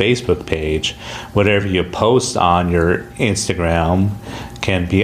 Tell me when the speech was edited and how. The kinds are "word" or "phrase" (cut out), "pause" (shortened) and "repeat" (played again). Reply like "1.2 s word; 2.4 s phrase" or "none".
none